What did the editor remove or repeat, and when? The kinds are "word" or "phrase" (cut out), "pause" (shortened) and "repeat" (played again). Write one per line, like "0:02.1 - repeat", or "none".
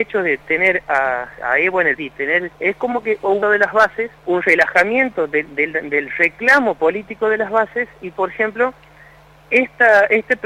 0:01.4 - word
0:02.0 - word
0:02.5 - pause
0:03.4 - phrase
0:04.2 - pause